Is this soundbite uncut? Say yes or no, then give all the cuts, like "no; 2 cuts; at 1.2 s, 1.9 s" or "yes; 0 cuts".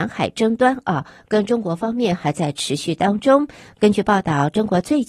yes; 0 cuts